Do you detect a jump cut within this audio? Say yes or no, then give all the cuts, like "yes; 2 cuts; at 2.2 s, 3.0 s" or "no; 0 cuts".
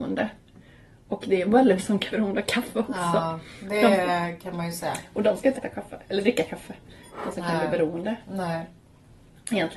yes; 3 cuts; at 1.8 s, 2.1 s, 5.6 s